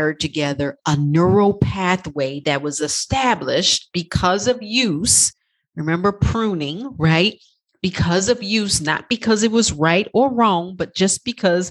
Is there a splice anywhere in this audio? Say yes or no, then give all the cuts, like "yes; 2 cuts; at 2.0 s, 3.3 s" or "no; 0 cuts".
no; 0 cuts